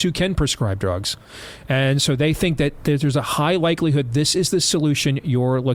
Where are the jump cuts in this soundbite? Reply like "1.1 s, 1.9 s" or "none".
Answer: none

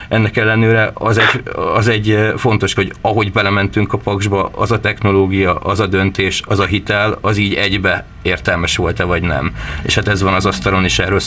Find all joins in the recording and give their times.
2.8 s

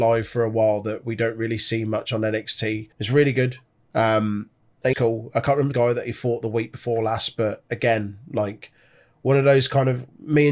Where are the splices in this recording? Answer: 2.9 s, 4.9 s, 5.7 s

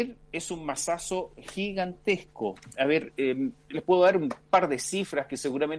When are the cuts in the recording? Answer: none

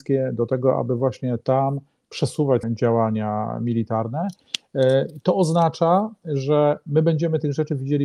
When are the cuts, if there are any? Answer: 2.6 s

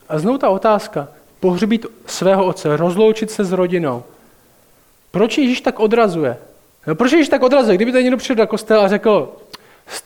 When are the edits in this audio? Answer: 6.7 s

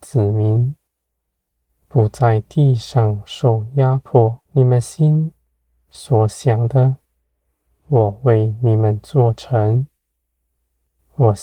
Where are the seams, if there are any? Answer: 4.4 s

